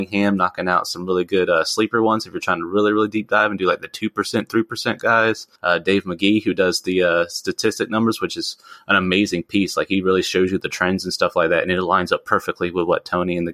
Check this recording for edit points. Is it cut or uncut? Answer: cut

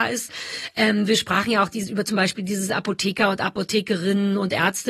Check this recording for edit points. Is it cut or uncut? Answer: uncut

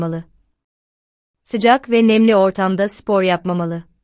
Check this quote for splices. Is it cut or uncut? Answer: uncut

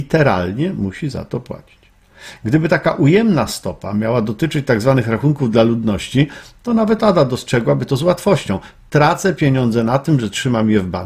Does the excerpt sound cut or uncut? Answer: uncut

